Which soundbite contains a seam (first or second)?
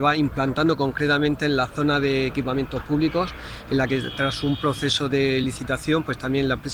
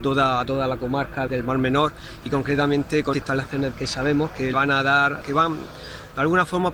second